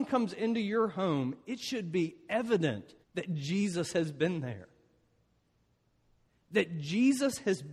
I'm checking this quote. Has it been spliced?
yes; 1 cut; at 3.0 s

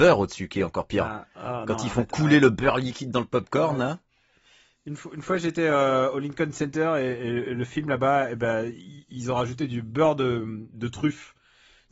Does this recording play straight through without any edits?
yes; 0 cuts

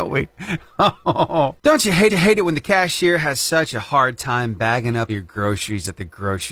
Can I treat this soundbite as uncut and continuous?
no; 2 cuts; at 2.1 s, 5.1 s

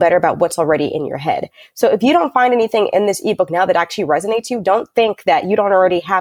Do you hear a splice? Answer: no; 0 cuts

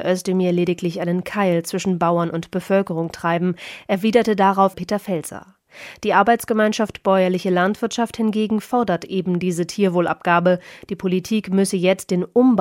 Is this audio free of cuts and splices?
no; 1 cut; at 4.7 s

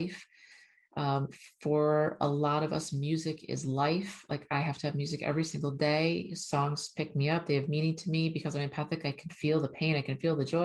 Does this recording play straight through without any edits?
yes; 0 cuts

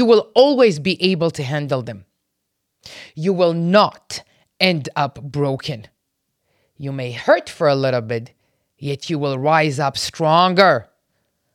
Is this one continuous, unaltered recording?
yes; 0 cuts

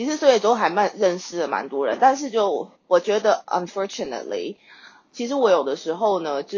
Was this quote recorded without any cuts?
no; 1 cut; at 2.8 s

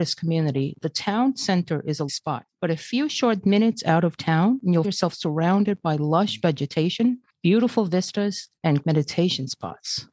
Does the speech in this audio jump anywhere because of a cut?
yes; 3 cuts; at 2.1 s, 4.8 s, 8.8 s

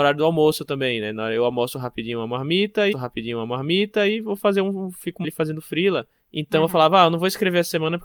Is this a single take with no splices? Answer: no; 3 cuts; at 2.9 s, 5.2 s, 6.1 s

